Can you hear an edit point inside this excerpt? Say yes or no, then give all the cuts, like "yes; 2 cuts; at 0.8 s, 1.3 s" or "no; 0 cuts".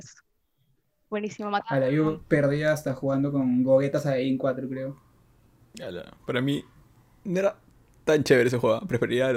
no; 0 cuts